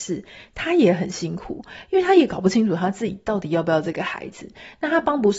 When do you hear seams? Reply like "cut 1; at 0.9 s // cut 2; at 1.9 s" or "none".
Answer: none